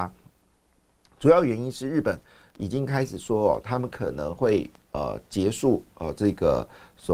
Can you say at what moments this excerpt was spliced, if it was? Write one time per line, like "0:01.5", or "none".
none

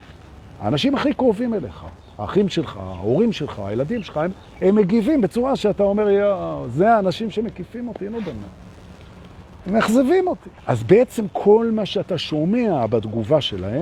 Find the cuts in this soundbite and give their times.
0:10.6

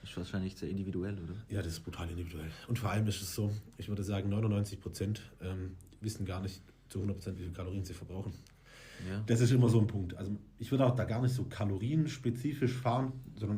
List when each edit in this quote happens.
none

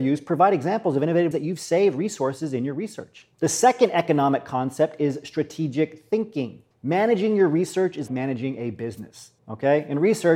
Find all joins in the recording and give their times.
0:01.3
0:03.3
0:06.7
0:08.1
0:09.4

